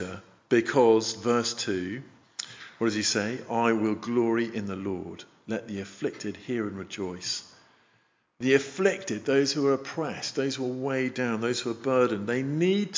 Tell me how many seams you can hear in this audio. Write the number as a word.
zero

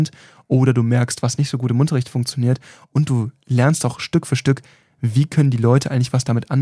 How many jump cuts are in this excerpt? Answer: zero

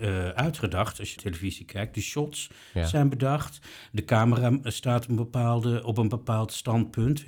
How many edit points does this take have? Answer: one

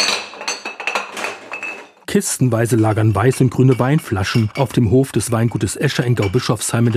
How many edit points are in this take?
zero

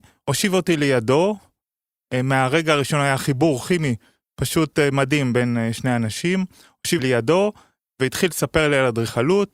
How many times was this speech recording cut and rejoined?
one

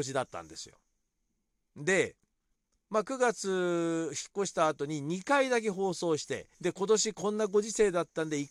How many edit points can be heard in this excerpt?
one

